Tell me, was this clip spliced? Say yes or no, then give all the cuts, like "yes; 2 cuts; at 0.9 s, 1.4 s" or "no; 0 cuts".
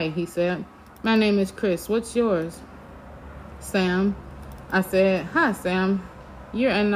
no; 0 cuts